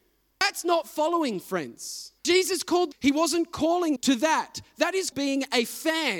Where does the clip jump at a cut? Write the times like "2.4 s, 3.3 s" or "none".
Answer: 2.2 s, 2.9 s, 4.0 s, 5.1 s

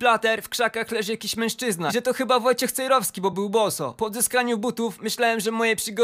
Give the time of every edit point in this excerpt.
none

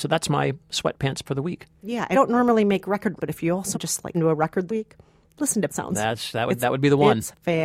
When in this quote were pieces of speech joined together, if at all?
1.2 s, 2.1 s, 3.2 s, 3.7 s, 4.1 s, 4.7 s, 5.7 s

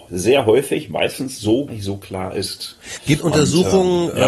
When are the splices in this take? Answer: 1.7 s, 3.2 s

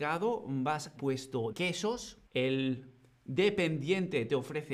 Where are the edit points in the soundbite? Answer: 1.0 s, 1.5 s, 2.3 s

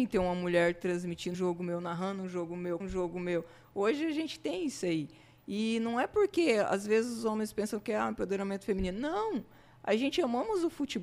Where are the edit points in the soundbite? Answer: 1.3 s, 2.8 s

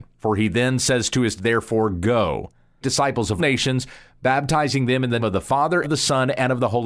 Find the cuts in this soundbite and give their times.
1.4 s, 2.8 s, 3.4 s, 5.2 s, 5.8 s

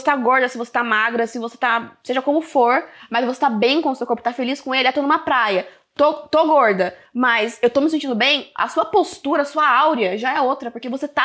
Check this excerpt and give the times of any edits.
none

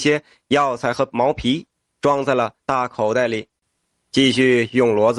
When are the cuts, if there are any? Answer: 2.6 s

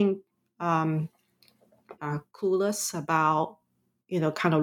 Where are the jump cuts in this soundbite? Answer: 2.0 s

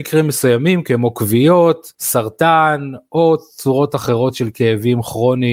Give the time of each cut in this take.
1.9 s

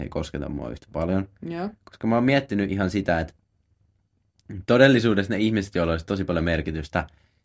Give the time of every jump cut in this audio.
none

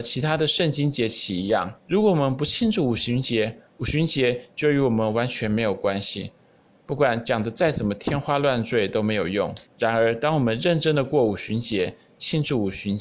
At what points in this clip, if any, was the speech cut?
1.8 s, 3.7 s, 9.7 s

